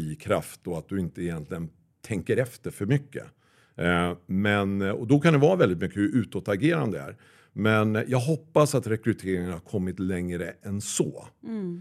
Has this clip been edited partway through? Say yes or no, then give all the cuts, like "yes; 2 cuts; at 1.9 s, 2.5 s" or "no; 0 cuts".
no; 0 cuts